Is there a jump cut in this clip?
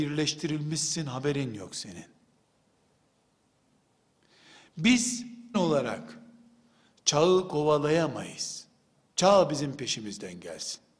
yes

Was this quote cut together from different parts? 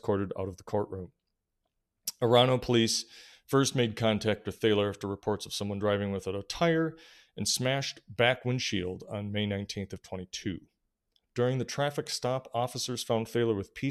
no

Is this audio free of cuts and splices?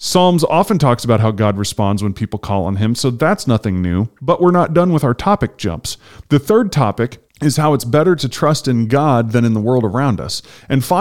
no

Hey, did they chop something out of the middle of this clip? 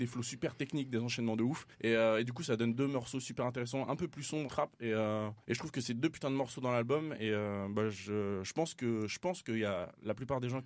yes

